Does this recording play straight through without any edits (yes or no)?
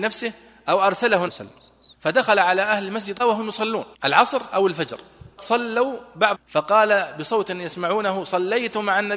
no